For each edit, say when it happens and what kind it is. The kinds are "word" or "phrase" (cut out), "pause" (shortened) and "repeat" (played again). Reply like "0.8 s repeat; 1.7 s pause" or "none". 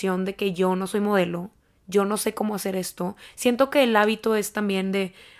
none